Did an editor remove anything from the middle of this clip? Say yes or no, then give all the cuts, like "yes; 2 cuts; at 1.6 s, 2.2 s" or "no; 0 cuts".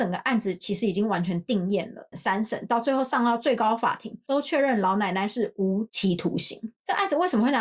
yes; 1 cut; at 2.1 s